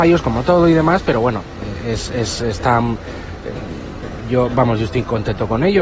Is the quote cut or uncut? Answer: uncut